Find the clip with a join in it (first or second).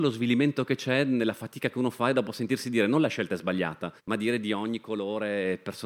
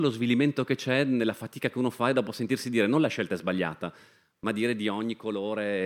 first